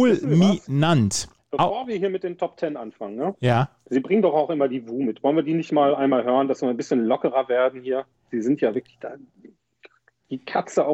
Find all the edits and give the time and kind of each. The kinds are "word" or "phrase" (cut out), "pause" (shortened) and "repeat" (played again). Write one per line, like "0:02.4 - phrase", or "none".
0:01.4 - pause